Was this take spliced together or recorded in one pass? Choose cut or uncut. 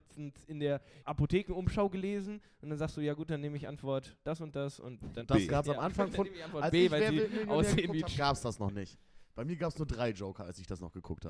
cut